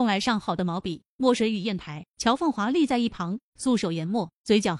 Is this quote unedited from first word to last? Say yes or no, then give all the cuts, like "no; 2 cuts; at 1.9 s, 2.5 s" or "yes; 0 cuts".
no; 1 cut; at 2.1 s